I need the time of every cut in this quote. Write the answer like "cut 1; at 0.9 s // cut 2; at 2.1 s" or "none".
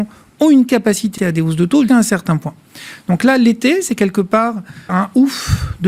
cut 1; at 1.2 s // cut 2; at 1.9 s // cut 3; at 4.9 s